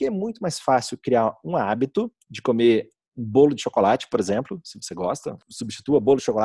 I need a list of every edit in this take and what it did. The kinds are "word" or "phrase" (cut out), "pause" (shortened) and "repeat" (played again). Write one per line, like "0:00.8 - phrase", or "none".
0:02.2 - pause
0:05.4 - pause